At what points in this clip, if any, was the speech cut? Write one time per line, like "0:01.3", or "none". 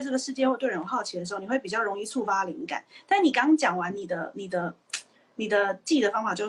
none